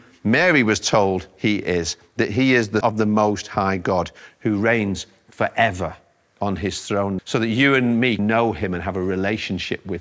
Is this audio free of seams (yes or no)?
no